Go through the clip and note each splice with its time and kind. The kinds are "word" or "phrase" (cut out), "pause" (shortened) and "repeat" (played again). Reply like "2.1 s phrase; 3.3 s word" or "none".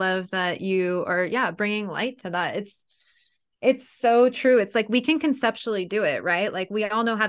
none